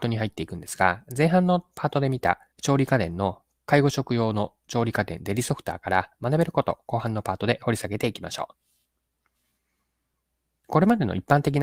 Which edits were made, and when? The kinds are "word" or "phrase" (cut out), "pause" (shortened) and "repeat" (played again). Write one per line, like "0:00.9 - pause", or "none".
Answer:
0:02.5 - pause